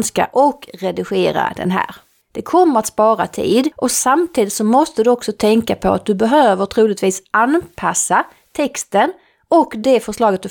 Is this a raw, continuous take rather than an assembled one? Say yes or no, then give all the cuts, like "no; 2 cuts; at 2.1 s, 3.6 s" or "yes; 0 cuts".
yes; 0 cuts